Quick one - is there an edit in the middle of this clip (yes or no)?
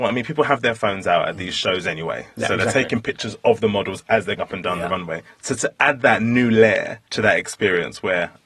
yes